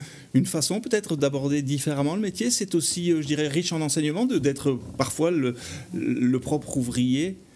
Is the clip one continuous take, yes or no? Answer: yes